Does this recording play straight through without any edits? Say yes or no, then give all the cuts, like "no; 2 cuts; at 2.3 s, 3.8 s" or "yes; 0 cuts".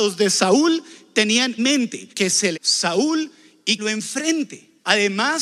no; 4 cuts; at 1.6 s, 2.1 s, 2.5 s, 3.8 s